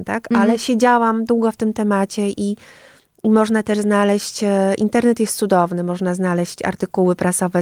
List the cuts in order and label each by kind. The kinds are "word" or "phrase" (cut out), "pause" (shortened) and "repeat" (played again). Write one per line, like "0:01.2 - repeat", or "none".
none